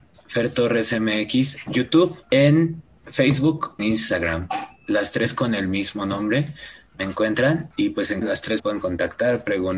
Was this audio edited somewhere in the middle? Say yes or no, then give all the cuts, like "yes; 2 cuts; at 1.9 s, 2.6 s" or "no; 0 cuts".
yes; 7 cuts; at 1.7 s, 2.2 s, 3.8 s, 4.8 s, 7.7 s, 8.2 s, 8.6 s